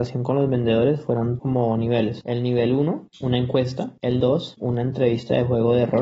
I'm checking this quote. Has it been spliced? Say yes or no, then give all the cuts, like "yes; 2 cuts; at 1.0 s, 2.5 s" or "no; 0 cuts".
yes; 3 cuts; at 1.4 s, 4.2 s, 4.6 s